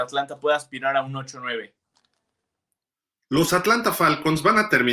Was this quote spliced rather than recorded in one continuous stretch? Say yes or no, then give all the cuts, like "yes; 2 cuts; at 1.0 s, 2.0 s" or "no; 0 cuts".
no; 0 cuts